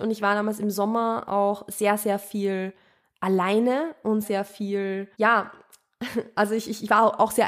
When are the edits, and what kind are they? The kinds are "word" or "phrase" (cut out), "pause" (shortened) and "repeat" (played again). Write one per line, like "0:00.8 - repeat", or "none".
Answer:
0:04.2 - word
0:05.1 - pause